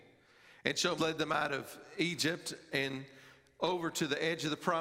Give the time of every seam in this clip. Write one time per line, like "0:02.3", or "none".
0:01.0